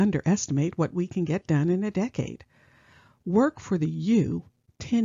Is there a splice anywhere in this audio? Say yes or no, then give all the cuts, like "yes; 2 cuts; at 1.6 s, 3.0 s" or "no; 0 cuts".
no; 0 cuts